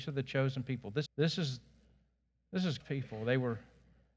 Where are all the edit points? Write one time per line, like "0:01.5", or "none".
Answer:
0:01.1
0:02.8

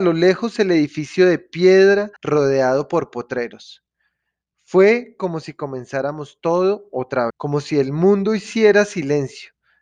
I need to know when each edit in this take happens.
0:02.2
0:07.3

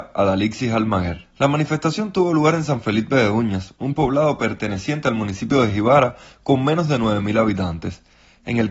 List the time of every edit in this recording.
none

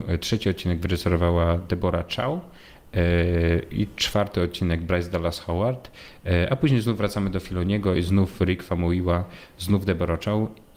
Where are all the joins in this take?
none

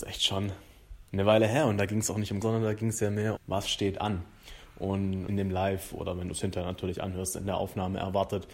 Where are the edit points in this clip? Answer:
0:01.1
0:02.4
0:03.4
0:05.3

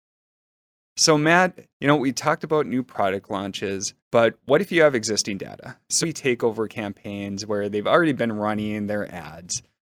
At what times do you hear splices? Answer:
0:01.7
0:04.0
0:06.0

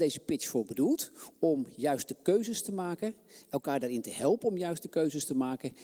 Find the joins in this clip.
none

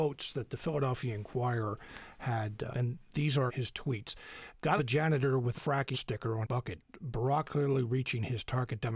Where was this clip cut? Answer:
0:02.7
0:03.5
0:04.8
0:05.5
0:05.9
0:06.4
0:07.4

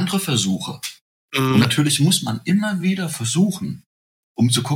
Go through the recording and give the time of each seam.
none

